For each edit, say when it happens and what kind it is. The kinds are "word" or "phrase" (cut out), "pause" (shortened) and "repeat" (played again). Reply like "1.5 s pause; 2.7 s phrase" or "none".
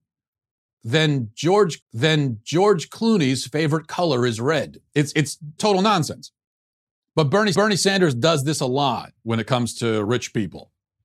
1.8 s repeat; 4.9 s pause; 5.6 s word; 7.5 s repeat